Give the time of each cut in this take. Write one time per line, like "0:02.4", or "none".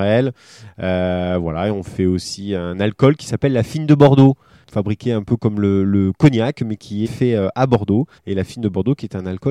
0:07.1
0:08.2